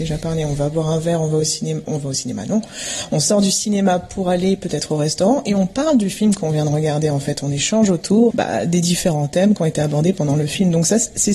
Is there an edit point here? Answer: yes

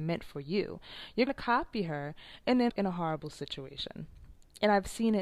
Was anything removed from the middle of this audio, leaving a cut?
yes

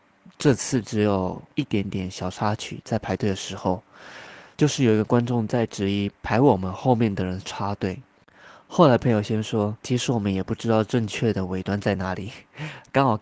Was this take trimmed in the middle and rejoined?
yes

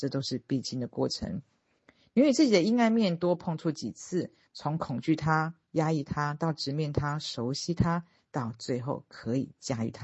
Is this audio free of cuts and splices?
yes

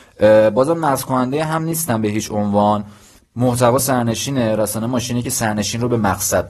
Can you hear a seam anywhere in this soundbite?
no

